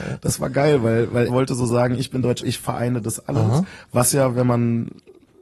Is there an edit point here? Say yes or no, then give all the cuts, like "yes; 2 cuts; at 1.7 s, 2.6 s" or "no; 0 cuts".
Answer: yes; 2 cuts; at 1.3 s, 2.4 s